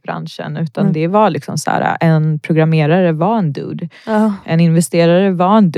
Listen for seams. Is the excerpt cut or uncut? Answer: uncut